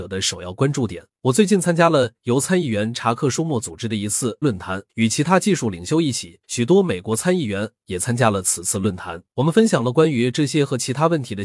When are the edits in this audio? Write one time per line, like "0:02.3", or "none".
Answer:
0:01.1
0:04.4
0:04.9
0:06.4
0:09.3